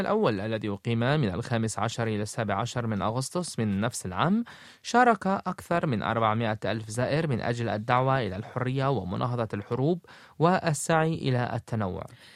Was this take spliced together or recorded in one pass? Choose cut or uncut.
uncut